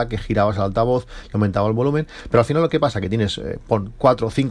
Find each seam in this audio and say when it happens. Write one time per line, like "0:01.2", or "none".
none